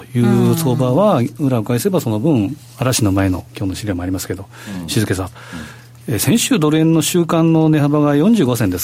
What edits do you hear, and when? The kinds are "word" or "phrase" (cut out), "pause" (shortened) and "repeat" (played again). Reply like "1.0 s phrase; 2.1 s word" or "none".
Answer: 3.5 s pause